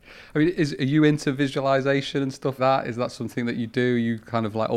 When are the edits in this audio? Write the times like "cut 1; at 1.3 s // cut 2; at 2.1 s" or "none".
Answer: cut 1; at 2.6 s